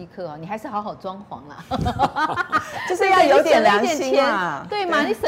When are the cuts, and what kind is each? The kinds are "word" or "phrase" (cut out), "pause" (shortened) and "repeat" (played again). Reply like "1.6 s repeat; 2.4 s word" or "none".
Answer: none

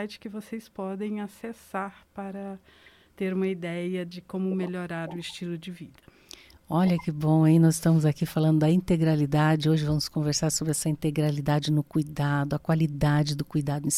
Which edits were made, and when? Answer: none

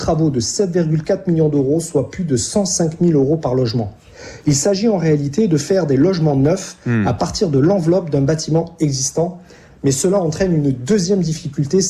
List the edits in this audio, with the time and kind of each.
none

